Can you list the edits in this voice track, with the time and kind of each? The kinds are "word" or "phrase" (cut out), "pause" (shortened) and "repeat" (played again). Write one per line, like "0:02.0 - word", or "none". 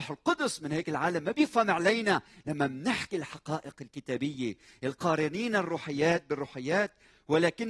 none